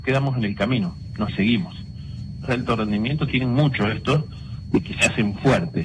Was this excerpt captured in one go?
no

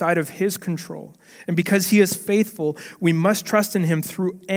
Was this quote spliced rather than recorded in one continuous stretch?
no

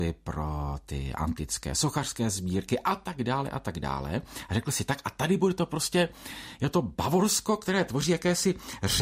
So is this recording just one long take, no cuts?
yes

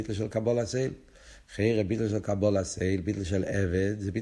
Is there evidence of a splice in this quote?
no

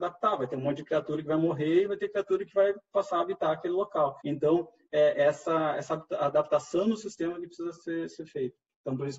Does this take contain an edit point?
yes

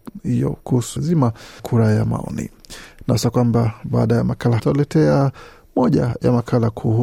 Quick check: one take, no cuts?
no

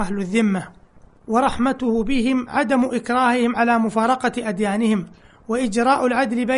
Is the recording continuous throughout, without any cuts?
yes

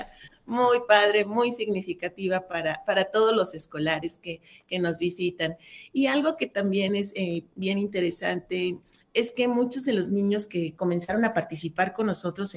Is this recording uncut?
yes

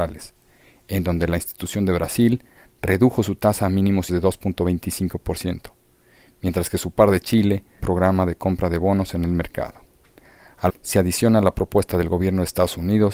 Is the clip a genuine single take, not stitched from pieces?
no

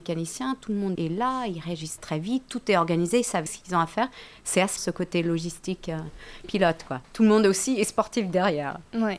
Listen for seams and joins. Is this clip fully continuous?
no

